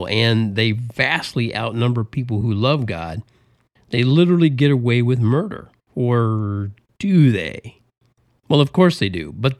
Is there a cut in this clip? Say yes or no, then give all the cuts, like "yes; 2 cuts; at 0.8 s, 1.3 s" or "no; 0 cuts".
no; 0 cuts